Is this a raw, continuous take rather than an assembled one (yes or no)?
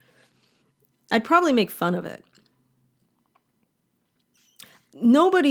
yes